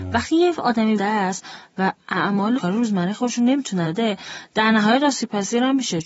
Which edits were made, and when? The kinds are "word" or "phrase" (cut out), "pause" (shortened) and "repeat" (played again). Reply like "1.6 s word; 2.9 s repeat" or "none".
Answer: 1.0 s word; 2.6 s phrase; 3.8 s word